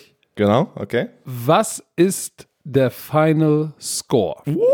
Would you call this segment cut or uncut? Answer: uncut